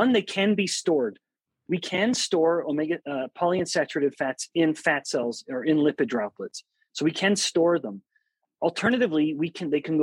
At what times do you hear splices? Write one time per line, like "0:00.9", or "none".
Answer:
none